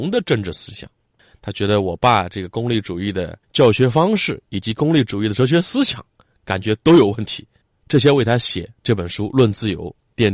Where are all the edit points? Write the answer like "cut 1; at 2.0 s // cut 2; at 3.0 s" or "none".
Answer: cut 1; at 3.4 s